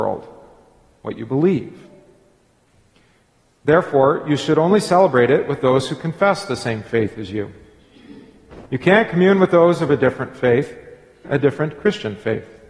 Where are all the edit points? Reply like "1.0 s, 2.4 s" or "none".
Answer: 8.7 s, 11.2 s